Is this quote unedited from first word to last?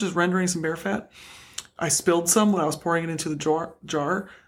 yes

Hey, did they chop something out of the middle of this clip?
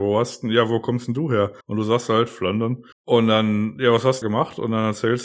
yes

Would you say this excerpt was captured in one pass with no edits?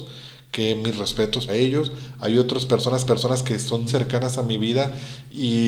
no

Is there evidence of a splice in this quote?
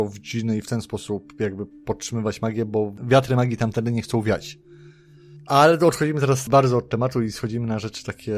no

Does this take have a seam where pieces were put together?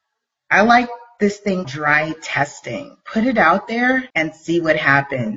yes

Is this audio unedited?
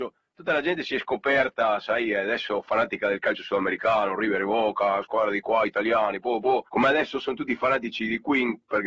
no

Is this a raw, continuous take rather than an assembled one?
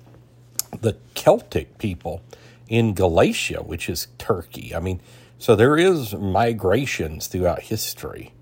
yes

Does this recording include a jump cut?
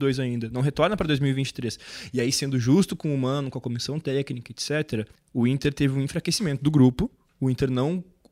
yes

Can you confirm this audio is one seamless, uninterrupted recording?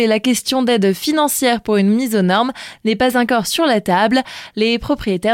yes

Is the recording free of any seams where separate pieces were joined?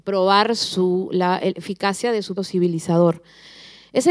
no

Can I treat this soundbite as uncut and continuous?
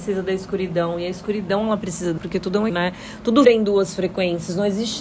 no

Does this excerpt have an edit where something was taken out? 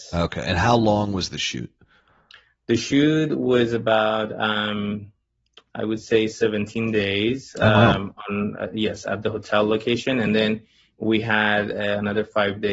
no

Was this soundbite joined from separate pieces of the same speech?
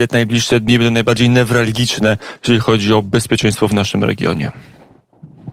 no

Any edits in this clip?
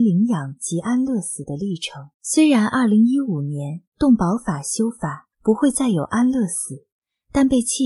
yes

